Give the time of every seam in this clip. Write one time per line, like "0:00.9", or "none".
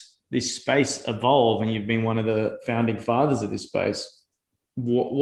none